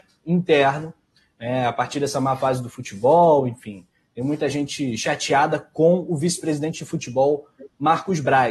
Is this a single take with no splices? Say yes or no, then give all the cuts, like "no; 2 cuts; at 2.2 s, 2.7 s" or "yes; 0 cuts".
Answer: yes; 0 cuts